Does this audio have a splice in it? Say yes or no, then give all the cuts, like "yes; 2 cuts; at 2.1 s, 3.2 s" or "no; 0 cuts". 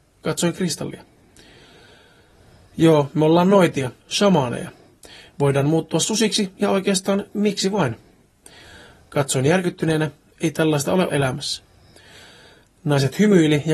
yes; 2 cuts; at 4.0 s, 11.1 s